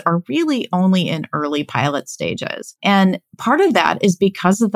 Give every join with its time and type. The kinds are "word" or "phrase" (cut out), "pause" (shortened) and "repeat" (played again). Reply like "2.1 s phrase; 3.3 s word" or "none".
none

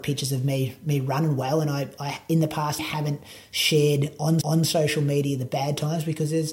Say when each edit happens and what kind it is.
2.8 s word; 4.4 s repeat

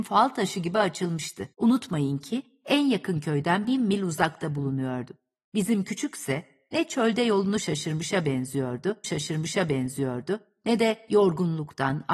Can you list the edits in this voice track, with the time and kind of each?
1.5 s pause; 9.0 s repeat

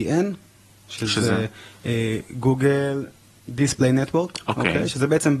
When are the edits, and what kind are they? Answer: none

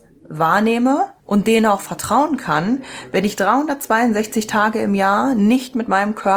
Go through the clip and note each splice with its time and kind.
1.2 s pause

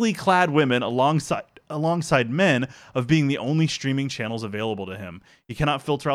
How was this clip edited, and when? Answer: none

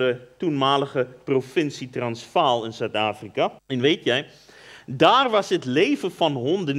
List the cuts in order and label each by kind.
3.6 s pause

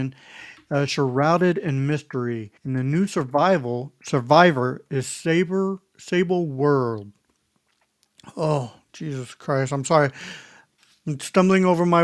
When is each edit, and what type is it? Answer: 2.6 s pause

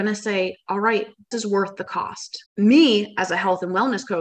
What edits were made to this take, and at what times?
1.3 s word; 2.5 s pause

